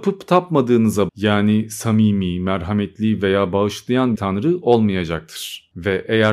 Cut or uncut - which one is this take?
cut